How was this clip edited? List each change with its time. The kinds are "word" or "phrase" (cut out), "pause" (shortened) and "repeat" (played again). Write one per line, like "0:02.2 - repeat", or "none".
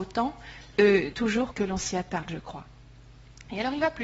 0:01.1 - word
0:01.5 - phrase